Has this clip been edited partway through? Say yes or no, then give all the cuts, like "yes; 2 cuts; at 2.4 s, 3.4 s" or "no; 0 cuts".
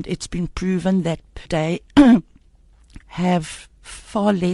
yes; 2 cuts; at 1.5 s, 3.0 s